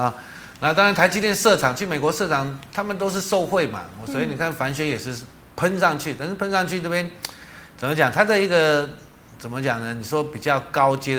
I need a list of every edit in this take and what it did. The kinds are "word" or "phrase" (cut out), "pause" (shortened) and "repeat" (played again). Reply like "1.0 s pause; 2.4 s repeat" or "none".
none